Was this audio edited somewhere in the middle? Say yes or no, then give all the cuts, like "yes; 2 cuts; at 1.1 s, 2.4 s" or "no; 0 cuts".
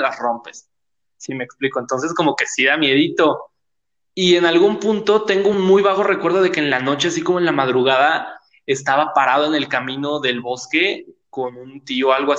no; 0 cuts